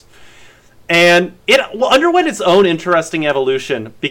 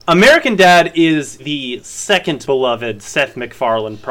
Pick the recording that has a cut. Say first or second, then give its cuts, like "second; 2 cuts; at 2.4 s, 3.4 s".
second; 2 cuts; at 1.4 s, 2.4 s